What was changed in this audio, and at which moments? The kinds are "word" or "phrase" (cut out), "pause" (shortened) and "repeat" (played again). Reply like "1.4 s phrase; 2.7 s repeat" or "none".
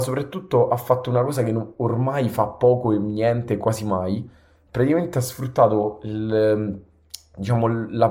none